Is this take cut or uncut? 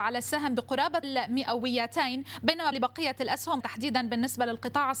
cut